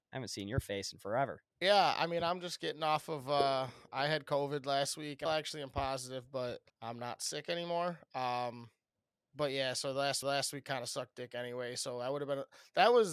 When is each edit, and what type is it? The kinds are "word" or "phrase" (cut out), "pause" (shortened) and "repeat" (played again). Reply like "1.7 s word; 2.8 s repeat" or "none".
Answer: 1.5 s pause; 5.2 s phrase; 6.7 s pause; 8.9 s pause; 10.2 s repeat